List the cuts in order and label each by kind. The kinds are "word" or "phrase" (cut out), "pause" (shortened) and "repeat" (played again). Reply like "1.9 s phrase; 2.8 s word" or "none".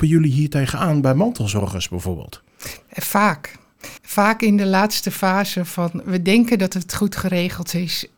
4.0 s pause